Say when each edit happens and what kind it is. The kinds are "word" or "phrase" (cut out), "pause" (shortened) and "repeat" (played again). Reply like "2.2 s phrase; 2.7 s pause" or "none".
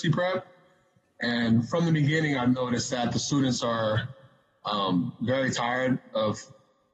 none